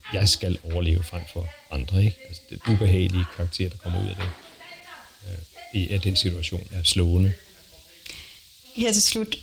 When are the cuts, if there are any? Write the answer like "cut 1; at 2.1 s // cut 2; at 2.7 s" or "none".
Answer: cut 1; at 2.6 s // cut 2; at 6.7 s